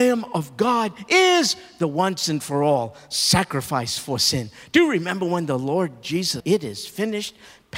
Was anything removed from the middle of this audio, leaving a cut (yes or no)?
yes